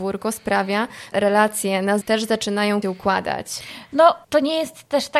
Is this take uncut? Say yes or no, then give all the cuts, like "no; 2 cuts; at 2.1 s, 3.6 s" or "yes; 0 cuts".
no; 4 cuts; at 1.1 s, 2.0 s, 2.8 s, 4.2 s